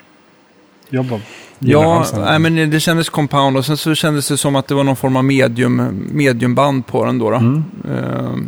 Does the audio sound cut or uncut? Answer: uncut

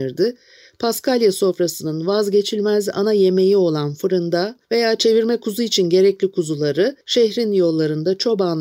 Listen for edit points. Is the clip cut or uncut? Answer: cut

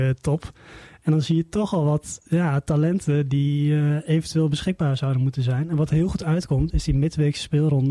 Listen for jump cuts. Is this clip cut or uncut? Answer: uncut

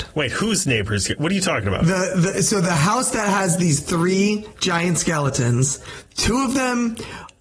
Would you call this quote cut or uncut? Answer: uncut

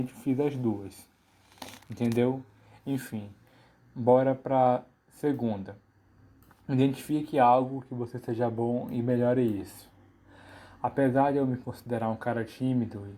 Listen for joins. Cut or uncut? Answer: uncut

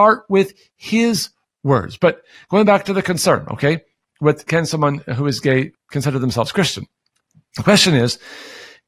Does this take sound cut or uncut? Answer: uncut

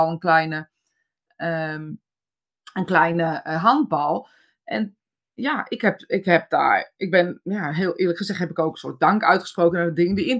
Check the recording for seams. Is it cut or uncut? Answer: uncut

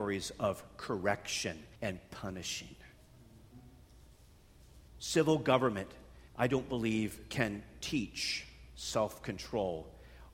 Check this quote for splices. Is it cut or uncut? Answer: cut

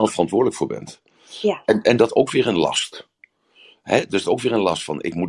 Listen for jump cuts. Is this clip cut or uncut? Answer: cut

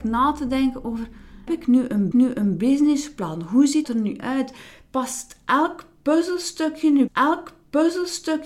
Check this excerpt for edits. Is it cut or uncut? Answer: cut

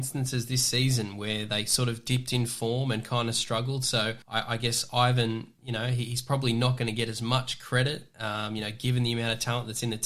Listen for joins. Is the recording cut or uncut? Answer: cut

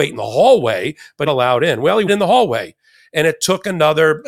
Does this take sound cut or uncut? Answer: cut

